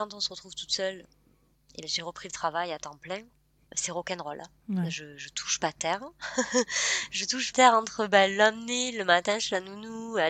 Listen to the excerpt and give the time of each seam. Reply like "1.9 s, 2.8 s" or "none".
7.5 s

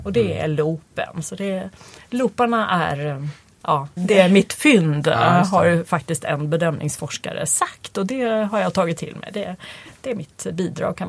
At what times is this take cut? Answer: 4.0 s

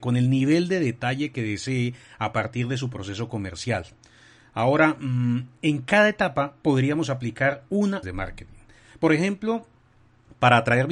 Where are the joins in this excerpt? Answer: 8.0 s

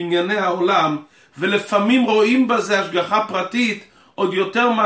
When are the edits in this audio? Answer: none

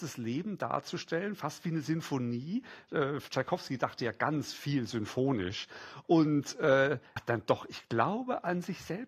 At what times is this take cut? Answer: 7.2 s

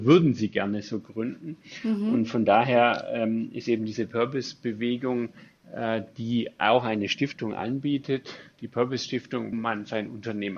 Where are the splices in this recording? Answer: 9.5 s

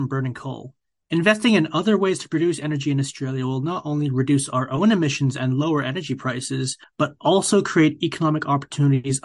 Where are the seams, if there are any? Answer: 6.8 s

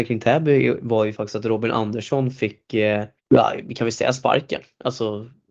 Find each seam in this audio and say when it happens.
3.2 s

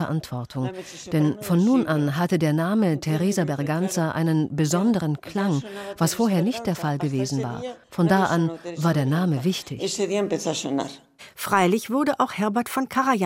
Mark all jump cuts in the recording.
7.8 s

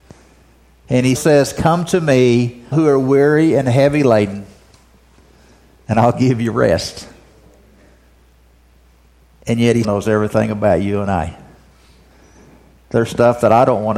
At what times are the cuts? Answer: 1.1 s, 2.7 s, 9.8 s

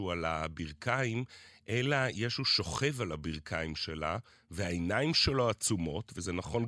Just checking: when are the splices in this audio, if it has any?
none

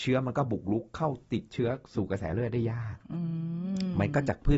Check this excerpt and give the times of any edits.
1.8 s

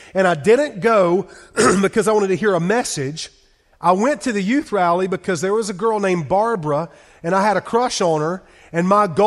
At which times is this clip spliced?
none

